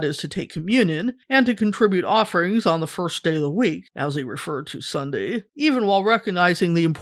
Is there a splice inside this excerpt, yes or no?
yes